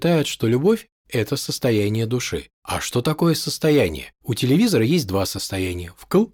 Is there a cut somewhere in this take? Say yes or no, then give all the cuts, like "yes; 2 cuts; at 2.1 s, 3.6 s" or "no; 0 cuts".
yes; 2 cuts; at 2.5 s, 4.2 s